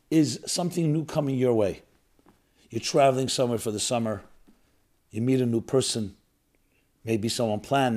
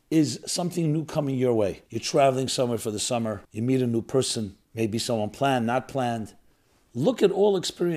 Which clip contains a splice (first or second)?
second